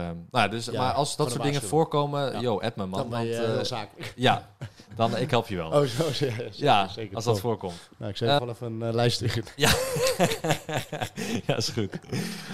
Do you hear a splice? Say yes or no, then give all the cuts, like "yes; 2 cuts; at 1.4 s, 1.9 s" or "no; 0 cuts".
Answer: yes; 1 cut; at 8.4 s